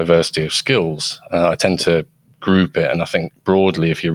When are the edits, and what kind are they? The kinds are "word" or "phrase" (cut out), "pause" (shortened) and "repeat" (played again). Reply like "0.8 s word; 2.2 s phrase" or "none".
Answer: none